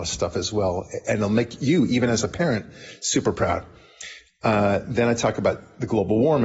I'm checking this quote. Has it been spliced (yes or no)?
no